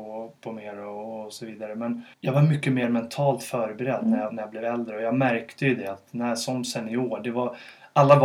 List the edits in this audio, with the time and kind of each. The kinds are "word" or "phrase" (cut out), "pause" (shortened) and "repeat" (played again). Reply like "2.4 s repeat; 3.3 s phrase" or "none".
2.1 s pause; 4.3 s word

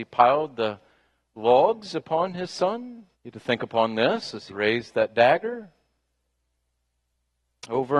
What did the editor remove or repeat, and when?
3.1 s pause; 4.5 s word

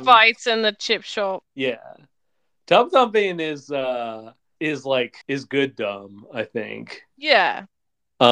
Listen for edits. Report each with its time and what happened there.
1.5 s pause; 4.6 s word; 5.2 s pause

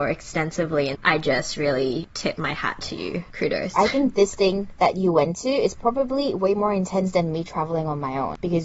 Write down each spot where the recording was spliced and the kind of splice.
none

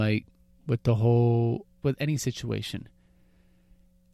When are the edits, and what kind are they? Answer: 1.8 s word

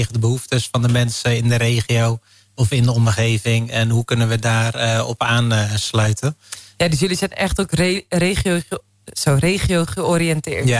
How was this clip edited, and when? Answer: none

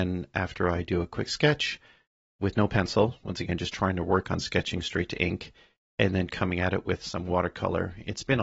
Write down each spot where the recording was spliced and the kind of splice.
none

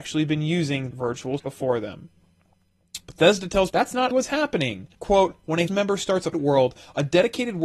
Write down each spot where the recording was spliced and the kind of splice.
0.9 s word; 1.4 s word; 3.0 s pause; 3.7 s word; 4.1 s word; 4.9 s pause; 5.7 s phrase; 6.3 s word

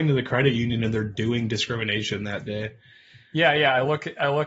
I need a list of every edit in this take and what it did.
none

